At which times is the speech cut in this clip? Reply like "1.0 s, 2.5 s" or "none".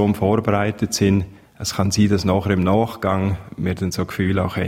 none